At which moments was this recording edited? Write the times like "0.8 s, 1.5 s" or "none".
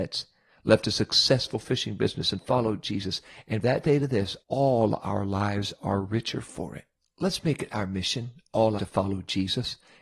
3.6 s, 4.4 s, 7.0 s, 8.8 s